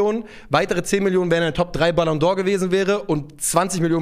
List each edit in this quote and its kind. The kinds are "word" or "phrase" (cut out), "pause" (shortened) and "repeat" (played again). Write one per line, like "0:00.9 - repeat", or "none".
none